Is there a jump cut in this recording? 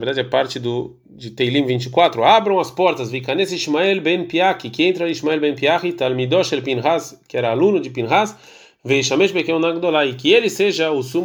no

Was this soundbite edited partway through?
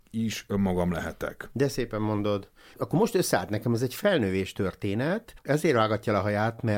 yes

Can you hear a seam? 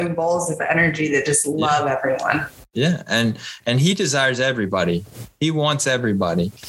no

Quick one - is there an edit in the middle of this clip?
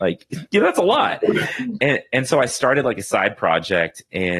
no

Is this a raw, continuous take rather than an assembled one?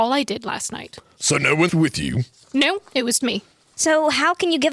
no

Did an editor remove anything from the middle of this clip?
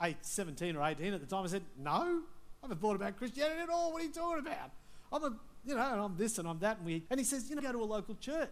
yes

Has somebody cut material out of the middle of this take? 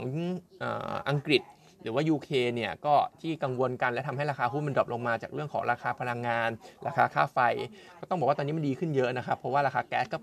no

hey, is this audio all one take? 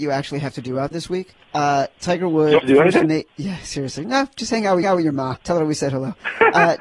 no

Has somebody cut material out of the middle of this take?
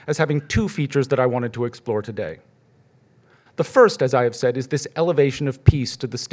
no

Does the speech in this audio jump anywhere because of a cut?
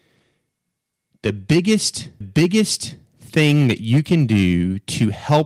yes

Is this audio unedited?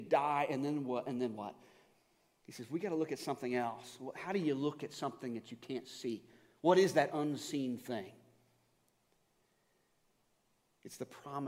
yes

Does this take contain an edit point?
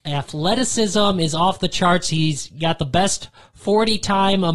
no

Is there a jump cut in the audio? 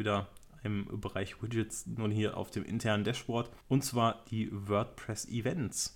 yes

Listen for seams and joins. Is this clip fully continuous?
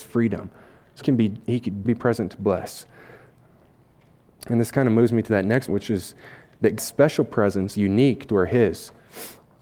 no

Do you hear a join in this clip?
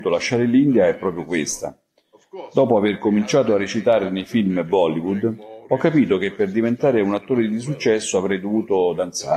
no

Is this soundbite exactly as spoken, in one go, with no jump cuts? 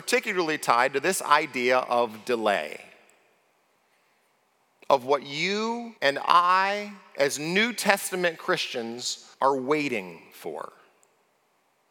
no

